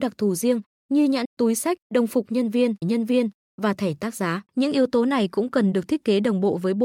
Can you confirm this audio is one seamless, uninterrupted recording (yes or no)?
no